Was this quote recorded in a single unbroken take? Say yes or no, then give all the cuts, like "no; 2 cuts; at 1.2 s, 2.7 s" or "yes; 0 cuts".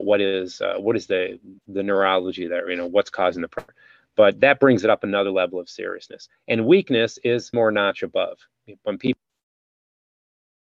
no; 2 cuts; at 1.6 s, 7.5 s